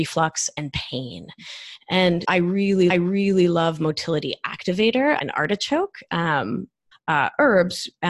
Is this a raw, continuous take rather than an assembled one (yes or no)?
no